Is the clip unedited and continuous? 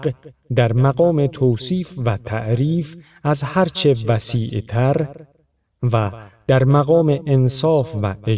yes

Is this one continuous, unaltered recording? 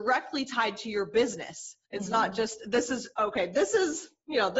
no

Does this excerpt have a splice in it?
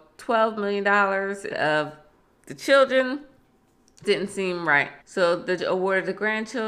yes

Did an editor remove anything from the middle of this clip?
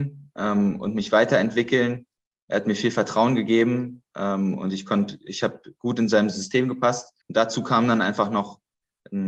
yes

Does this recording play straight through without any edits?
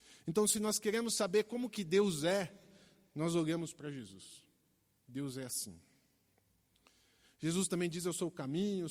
yes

